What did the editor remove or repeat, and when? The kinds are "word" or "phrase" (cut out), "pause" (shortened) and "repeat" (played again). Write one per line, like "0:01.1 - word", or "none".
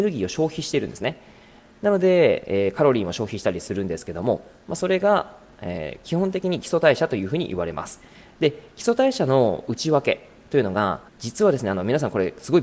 0:11.1 - pause